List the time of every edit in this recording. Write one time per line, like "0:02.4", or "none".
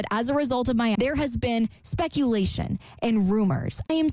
0:00.9